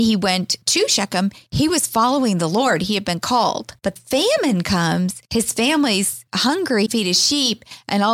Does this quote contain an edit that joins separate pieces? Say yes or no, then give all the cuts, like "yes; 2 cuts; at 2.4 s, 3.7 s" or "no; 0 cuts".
yes; 2 cuts; at 4.0 s, 6.9 s